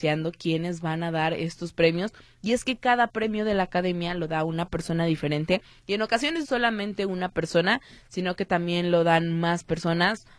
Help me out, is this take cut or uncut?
cut